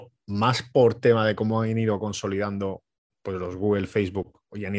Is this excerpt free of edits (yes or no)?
yes